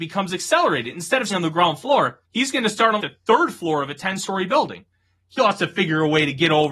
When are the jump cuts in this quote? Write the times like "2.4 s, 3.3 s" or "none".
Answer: 1.3 s, 2.2 s, 3.0 s, 5.4 s